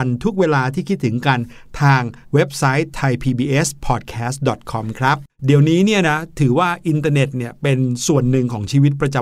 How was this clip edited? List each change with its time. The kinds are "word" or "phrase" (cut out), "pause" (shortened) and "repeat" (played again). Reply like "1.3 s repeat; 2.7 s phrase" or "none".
2.2 s pause